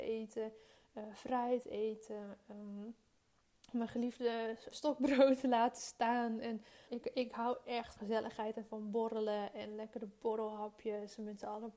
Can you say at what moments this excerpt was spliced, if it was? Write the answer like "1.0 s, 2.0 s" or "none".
4.7 s, 6.9 s, 8.0 s